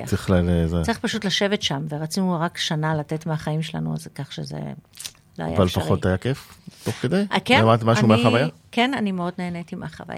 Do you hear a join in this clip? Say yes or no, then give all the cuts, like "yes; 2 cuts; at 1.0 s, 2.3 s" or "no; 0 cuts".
no; 0 cuts